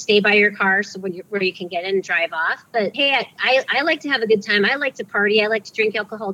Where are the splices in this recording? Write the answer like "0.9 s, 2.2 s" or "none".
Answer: 2.9 s